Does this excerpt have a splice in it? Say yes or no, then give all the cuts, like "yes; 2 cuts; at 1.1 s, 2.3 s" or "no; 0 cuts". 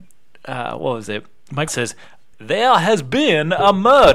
yes; 2 cuts; at 1.7 s, 2.3 s